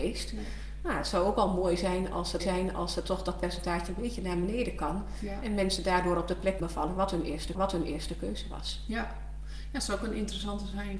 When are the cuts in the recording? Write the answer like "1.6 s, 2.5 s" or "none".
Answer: 2.4 s, 6.6 s, 7.5 s

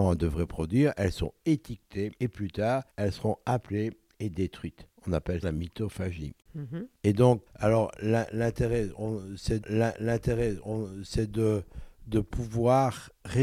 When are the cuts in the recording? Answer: 2.2 s, 2.9 s, 5.0 s, 5.4 s, 7.5 s, 9.6 s

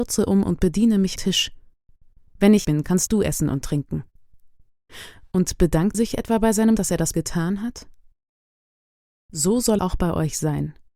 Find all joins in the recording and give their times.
1.2 s, 2.6 s, 3.1 s, 5.9 s, 6.8 s, 7.1 s, 9.8 s

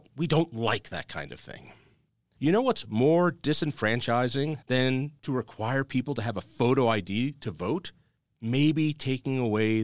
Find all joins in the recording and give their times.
none

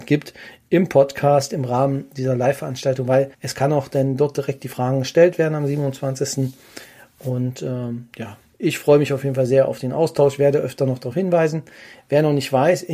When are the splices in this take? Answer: 3.3 s

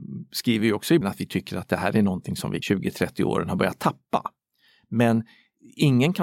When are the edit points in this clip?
1.0 s, 2.6 s

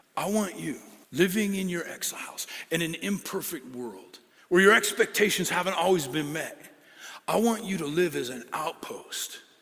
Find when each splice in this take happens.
1.0 s, 4.3 s

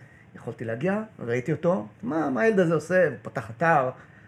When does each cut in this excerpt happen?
1.9 s

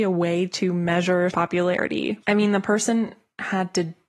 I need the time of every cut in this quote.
1.3 s, 2.2 s

